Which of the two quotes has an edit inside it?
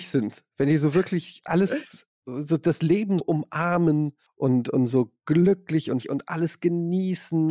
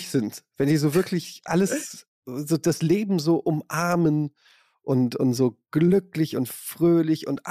first; 3 cuts; at 3.2 s, 4.3 s, 6.0 s

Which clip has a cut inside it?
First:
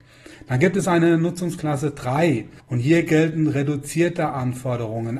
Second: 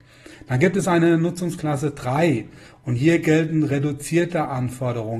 first; 1 cut; at 2.6 s

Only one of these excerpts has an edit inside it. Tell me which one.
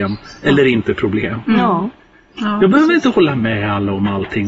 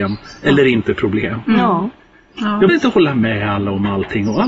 second; 1 cut; at 2.7 s

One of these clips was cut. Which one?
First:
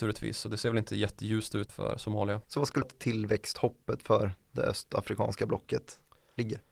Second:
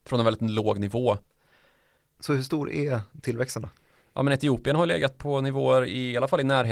first; 3 cuts; at 1.7 s, 2.4 s, 2.8 s

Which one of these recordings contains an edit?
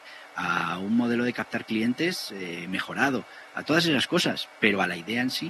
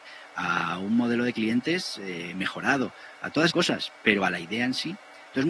second; 2 cuts; at 1.3 s, 3.5 s

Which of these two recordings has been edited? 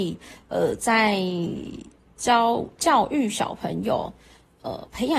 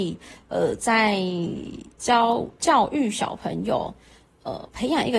second; 1 cut; at 1.9 s

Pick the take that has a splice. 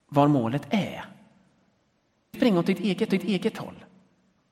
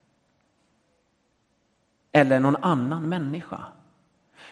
first; 2 cuts; at 2.3 s, 3.1 s

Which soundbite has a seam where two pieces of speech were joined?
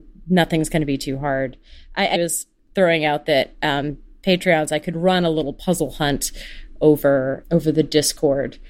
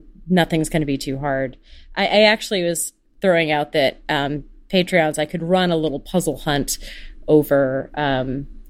first; 2 cuts; at 2.1 s, 7.4 s

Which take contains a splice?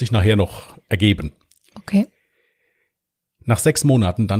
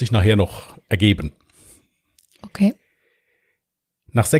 first; 1 cut; at 1.4 s

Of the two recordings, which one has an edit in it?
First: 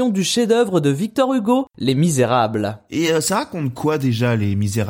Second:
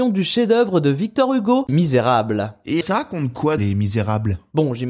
second; 3 cuts; at 1.7 s, 2.8 s, 3.6 s

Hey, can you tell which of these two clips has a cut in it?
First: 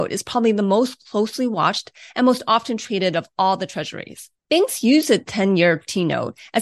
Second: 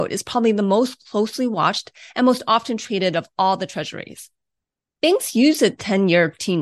first; 1 cut; at 4.4 s

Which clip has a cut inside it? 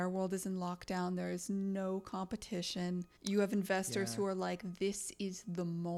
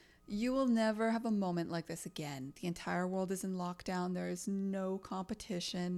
first; 1 cut; at 3.2 s

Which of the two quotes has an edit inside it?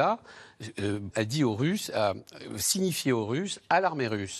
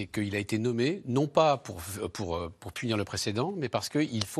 first; 1 cut; at 1.1 s

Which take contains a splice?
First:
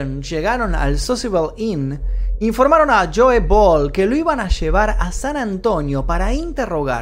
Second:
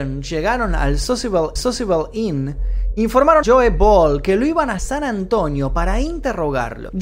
second; 3 cuts; at 1.6 s, 3.4 s, 4.8 s

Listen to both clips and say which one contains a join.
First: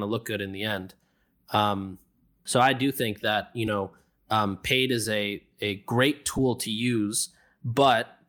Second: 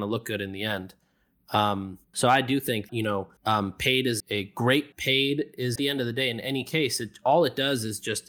second; 6 cuts; at 2.0 s, 2.9 s, 3.4 s, 4.2 s, 4.9 s, 5.8 s

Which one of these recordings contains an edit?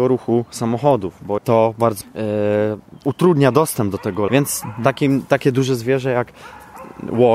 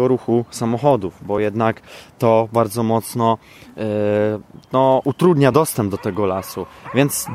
first; 4 cuts; at 1.4 s, 2.0 s, 3.0 s, 4.3 s

